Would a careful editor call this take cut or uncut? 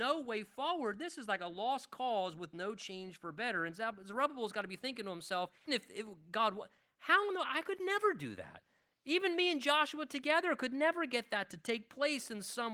cut